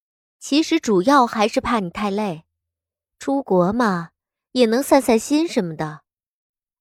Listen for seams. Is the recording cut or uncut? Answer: uncut